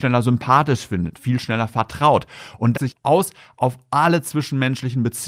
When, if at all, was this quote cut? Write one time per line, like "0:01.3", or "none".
0:02.7

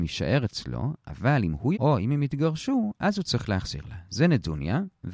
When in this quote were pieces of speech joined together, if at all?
0:01.7

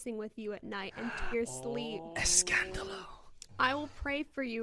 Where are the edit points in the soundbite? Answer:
0:01.3

